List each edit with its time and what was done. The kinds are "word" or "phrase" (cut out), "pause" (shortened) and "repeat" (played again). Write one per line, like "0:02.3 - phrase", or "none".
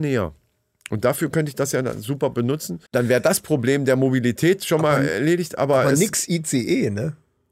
0:02.9 - pause